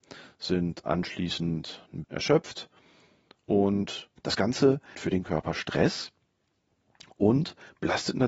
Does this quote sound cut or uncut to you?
cut